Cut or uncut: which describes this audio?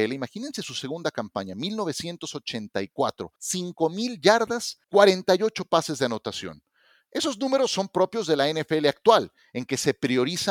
cut